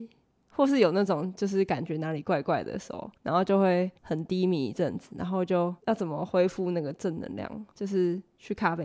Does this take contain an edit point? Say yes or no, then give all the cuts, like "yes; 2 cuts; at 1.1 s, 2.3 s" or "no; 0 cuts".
yes; 4 cuts; at 3.2 s, 4.0 s, 5.8 s, 7.7 s